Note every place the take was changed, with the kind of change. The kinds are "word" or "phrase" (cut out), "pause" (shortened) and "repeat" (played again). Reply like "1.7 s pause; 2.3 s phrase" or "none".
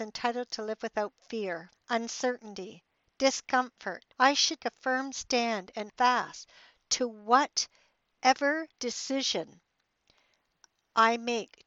1.7 s pause; 4.1 s pause; 4.6 s word; 5.9 s word; 8.7 s pause